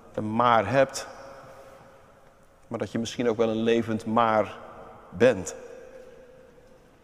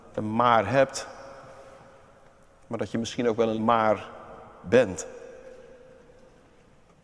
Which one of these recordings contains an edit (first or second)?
second